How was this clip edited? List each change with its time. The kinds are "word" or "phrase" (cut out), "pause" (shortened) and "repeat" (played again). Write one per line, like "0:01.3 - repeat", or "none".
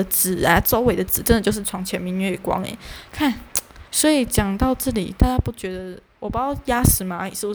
0:03.8 - pause

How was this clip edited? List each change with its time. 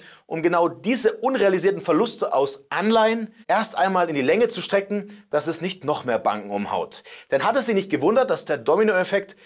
0:03.4 - pause

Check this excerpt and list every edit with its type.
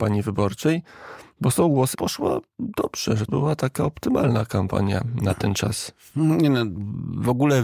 0:01.9 - word
0:03.3 - word

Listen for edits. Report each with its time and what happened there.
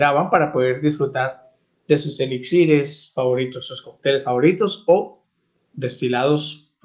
none

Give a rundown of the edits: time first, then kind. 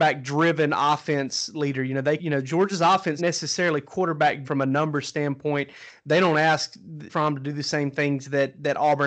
0:02.2 - word
0:03.2 - word
0:04.4 - word
0:07.1 - word

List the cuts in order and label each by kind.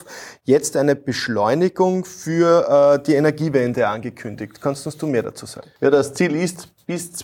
0:05.8 - pause

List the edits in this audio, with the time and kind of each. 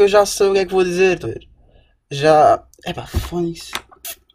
0:01.2 - word

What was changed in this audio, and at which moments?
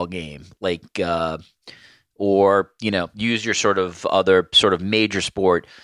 none

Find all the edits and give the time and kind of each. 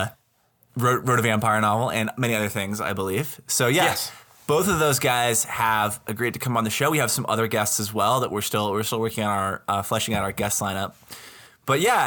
none

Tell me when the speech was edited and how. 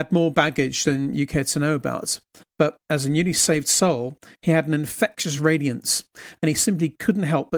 none

